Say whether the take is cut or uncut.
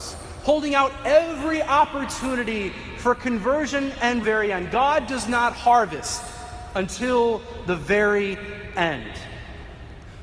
cut